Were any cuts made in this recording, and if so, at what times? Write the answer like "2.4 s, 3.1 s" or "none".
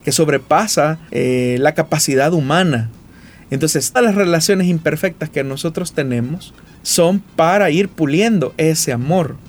1.1 s, 4.0 s, 6.7 s

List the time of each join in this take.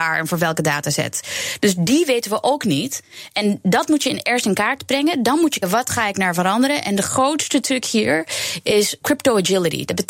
5.6 s, 9.0 s

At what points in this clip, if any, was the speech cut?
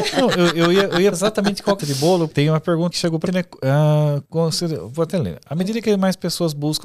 1.1 s, 1.8 s, 2.3 s, 2.9 s, 3.3 s, 4.3 s

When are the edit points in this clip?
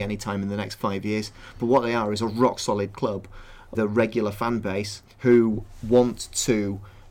3.7 s, 5.1 s

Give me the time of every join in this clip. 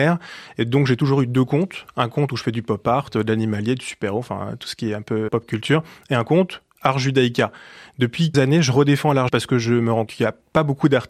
5.3 s, 8.3 s, 9.3 s, 10.1 s

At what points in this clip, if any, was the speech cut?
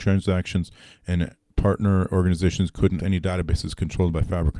3.0 s

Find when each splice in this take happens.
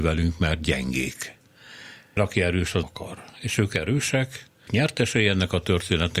2.2 s, 2.8 s, 4.7 s

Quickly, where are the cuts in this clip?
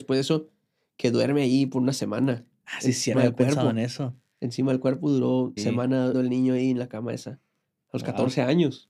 3.1 s, 5.6 s, 6.1 s

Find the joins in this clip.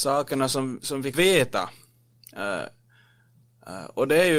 1.1 s

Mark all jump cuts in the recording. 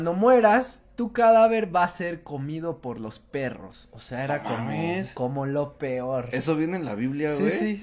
none

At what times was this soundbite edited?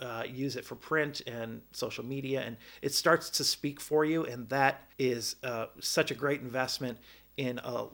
4.9 s

